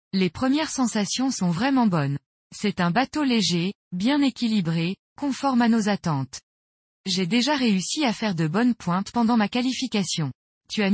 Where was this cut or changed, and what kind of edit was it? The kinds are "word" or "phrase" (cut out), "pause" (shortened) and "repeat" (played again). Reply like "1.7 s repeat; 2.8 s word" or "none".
none